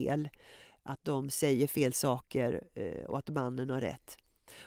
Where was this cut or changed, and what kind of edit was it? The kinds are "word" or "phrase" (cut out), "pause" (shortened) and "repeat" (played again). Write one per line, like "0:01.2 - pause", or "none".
none